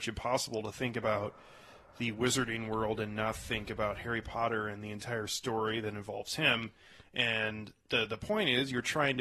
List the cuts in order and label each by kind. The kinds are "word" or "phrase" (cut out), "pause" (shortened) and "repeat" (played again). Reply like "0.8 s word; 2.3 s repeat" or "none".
none